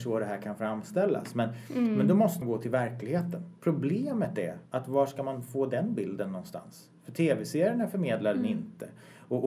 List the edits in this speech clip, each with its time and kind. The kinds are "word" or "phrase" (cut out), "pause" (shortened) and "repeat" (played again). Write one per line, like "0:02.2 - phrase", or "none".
0:02.4 - word
0:03.6 - pause
0:04.7 - pause